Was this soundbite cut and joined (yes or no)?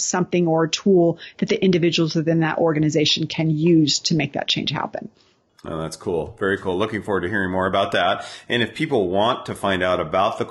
no